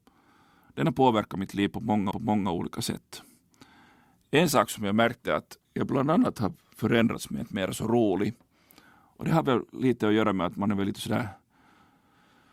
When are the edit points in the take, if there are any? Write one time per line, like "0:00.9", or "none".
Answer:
0:02.1
0:05.6
0:07.4